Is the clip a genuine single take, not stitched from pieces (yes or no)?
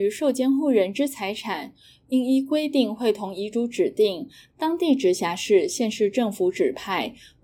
yes